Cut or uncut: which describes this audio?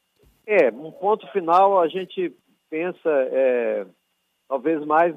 uncut